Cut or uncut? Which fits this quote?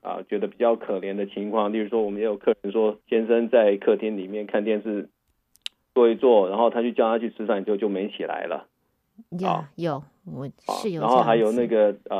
cut